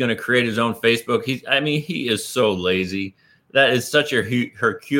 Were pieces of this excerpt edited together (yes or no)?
no